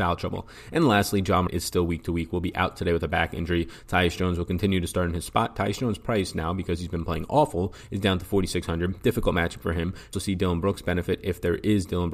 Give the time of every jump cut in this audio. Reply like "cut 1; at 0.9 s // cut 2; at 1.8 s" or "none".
cut 1; at 1.5 s // cut 2; at 10.1 s